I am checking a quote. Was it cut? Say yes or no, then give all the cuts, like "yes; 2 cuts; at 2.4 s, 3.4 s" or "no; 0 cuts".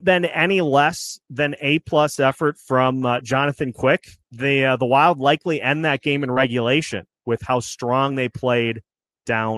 yes; 1 cut; at 4.2 s